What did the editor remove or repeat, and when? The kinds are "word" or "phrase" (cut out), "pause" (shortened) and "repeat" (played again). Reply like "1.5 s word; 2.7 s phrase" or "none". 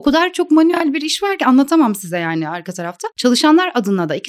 none